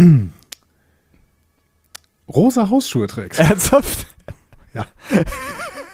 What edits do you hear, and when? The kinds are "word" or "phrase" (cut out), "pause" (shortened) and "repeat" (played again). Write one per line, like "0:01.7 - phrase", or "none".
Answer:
none